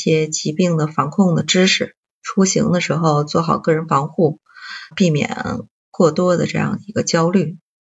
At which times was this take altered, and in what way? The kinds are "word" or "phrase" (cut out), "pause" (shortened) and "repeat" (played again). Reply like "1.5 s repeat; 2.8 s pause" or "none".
4.9 s word